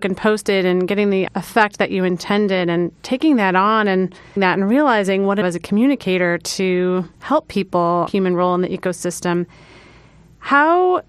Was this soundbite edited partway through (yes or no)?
yes